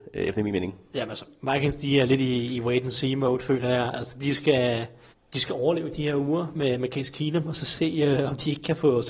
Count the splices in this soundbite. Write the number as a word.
one